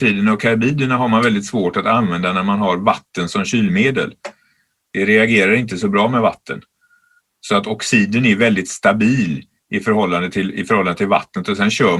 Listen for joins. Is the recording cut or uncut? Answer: uncut